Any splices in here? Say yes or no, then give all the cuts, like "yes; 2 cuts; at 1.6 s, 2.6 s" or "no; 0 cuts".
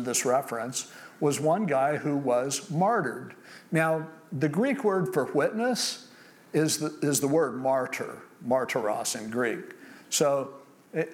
no; 0 cuts